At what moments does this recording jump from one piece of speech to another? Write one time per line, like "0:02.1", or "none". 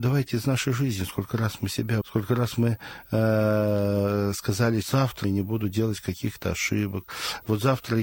0:02.0
0:04.8
0:05.2